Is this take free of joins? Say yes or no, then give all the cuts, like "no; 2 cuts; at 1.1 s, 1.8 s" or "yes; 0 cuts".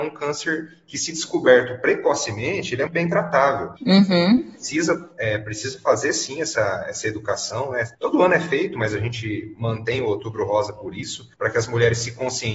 no; 4 cuts; at 2.9 s, 3.8 s, 7.9 s, 11.3 s